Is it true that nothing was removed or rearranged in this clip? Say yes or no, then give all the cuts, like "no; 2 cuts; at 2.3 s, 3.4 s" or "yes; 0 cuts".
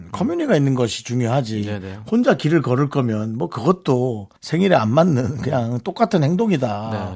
no; 1 cut; at 4.4 s